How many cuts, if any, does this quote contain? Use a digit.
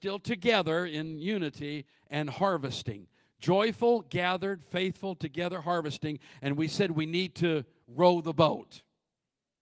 0